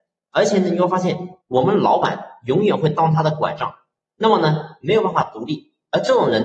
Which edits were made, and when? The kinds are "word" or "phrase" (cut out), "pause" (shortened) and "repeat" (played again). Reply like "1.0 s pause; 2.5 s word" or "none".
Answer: 1.4 s pause